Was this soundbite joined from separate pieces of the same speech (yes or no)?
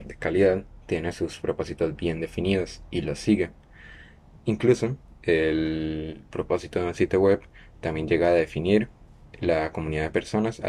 no